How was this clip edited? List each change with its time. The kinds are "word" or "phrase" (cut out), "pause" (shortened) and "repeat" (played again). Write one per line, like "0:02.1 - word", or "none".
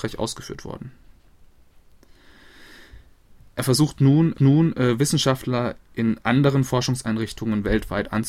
0:04.3 - repeat